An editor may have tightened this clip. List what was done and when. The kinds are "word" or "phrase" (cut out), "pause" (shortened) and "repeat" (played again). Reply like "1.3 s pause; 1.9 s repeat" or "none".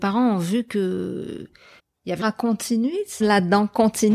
1.8 s pause; 2.2 s word; 3.2 s phrase